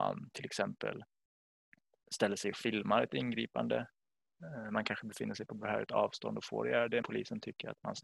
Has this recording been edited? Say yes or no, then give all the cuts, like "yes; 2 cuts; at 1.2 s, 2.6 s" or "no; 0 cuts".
yes; 1 cut; at 7.0 s